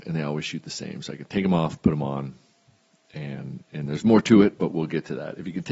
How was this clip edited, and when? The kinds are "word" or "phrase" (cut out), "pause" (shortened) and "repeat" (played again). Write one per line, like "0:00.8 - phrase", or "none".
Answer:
none